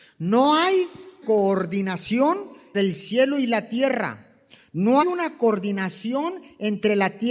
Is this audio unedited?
no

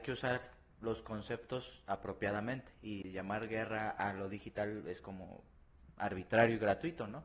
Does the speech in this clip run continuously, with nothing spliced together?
yes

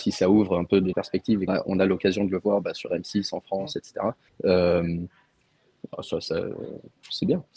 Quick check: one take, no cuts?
no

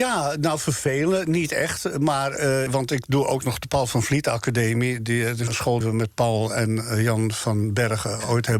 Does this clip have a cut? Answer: yes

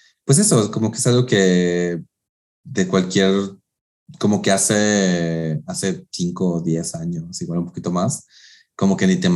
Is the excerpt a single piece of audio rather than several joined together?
yes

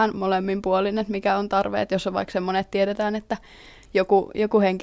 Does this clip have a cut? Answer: no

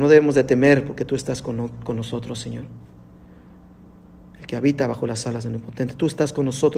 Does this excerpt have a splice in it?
no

